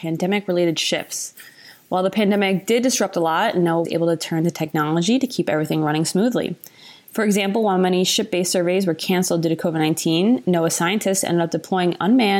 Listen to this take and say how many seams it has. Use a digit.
1